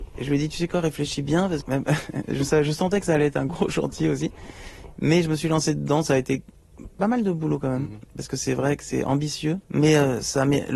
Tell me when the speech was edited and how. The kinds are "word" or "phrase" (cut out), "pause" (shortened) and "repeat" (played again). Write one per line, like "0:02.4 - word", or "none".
0:01.6 - word
0:03.5 - word
0:09.6 - pause